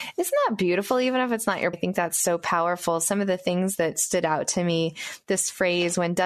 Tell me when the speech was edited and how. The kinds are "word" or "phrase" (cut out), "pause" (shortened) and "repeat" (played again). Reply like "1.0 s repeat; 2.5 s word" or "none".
1.7 s word